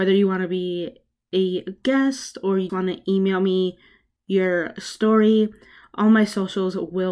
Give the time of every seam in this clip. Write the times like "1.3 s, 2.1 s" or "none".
2.7 s